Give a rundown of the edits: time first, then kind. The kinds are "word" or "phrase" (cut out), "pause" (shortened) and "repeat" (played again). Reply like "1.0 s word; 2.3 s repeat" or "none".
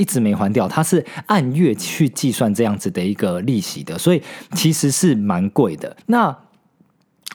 6.0 s pause